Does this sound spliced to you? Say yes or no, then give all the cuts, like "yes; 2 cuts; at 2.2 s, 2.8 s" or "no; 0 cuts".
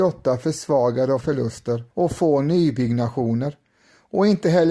yes; 2 cuts; at 1.2 s, 1.9 s